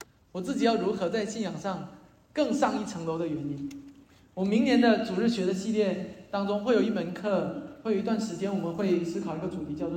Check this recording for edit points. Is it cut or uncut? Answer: uncut